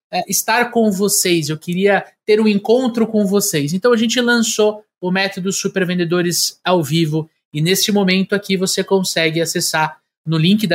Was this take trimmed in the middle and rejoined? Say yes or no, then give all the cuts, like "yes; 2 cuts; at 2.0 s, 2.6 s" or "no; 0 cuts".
no; 0 cuts